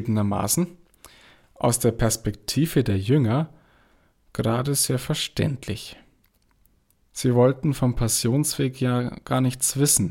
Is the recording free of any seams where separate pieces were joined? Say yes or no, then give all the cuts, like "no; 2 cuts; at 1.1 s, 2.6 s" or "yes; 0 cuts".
yes; 0 cuts